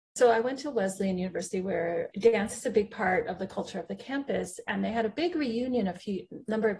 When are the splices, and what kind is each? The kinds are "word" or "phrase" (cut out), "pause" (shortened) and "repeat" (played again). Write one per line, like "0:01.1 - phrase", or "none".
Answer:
0:02.1 - word